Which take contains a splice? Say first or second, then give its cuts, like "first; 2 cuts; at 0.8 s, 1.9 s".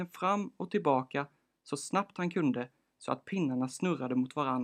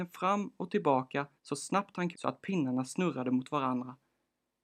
second; 2 cuts; at 1.4 s, 2.1 s